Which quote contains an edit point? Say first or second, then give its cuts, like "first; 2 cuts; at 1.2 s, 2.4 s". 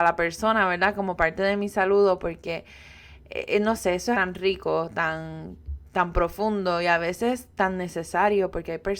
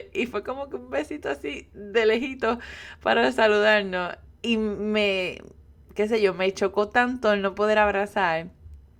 first; 1 cut; at 4.1 s